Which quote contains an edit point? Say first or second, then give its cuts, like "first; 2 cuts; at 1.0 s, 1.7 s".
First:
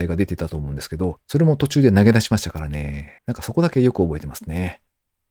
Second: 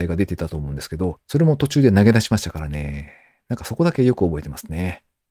first; 1 cut; at 3.2 s